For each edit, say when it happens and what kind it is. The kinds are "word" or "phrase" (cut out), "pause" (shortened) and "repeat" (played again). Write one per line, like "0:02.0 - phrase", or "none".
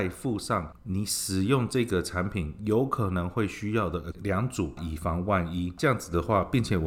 0:04.1 - word